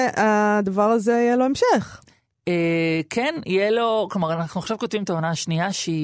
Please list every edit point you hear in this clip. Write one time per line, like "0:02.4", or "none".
none